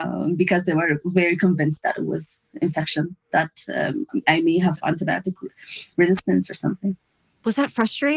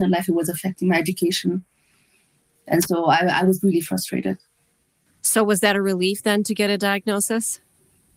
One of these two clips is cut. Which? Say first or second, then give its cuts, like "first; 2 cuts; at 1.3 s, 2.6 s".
first; 1 cut; at 4.8 s